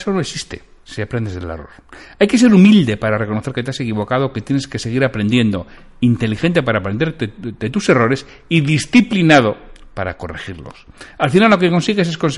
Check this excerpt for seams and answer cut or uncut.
uncut